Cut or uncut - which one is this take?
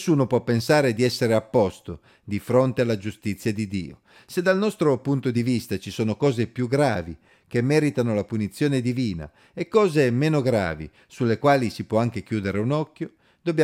uncut